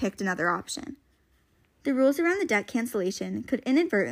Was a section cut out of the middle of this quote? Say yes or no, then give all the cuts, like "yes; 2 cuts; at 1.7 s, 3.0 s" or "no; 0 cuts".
no; 0 cuts